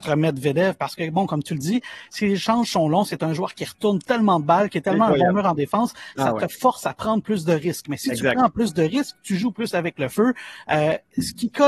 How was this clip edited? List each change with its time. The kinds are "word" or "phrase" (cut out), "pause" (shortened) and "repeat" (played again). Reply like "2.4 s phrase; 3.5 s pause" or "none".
none